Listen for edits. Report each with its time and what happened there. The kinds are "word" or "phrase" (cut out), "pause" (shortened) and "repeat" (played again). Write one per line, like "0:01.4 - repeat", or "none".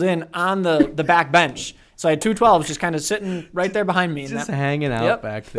none